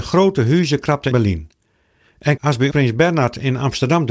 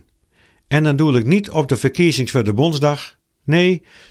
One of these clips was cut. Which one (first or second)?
first